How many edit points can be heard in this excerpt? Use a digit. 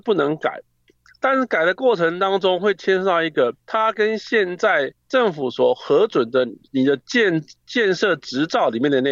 2